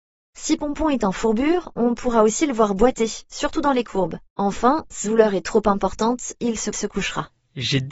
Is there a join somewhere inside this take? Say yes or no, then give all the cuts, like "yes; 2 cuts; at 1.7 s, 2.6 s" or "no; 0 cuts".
yes; 3 cuts; at 4.3 s, 5.0 s, 6.7 s